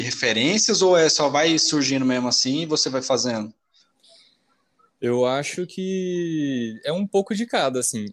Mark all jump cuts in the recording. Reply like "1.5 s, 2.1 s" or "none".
none